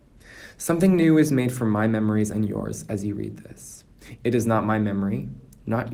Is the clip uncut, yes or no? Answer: yes